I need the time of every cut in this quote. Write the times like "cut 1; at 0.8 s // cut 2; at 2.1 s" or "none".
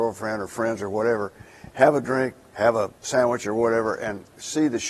cut 1; at 3.0 s